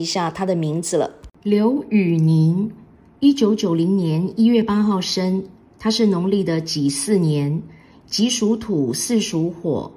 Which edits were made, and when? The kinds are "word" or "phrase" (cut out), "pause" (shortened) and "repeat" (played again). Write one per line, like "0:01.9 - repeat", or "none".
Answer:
none